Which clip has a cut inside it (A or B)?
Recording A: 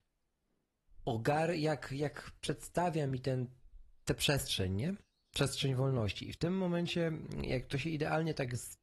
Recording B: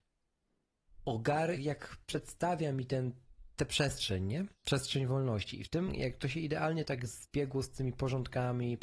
B